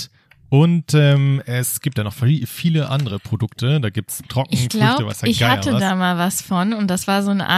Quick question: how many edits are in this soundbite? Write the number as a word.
one